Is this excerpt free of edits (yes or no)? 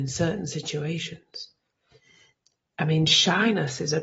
yes